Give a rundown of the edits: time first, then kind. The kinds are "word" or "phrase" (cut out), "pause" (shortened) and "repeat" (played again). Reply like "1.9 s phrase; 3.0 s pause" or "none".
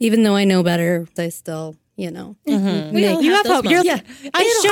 1.2 s word; 3.8 s word